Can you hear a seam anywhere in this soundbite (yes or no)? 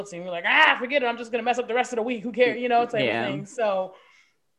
no